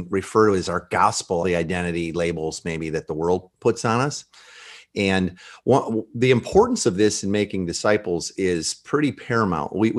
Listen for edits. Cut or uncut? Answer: cut